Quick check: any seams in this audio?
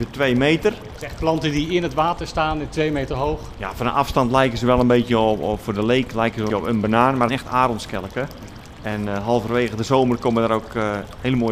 yes; 2 cuts; at 6.5 s, 7.3 s

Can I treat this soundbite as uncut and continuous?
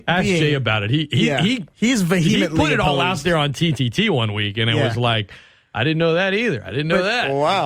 yes; 0 cuts

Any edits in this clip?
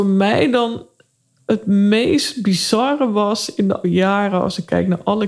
yes; 1 cut; at 3.8 s

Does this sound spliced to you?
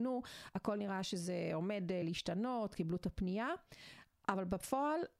no; 0 cuts

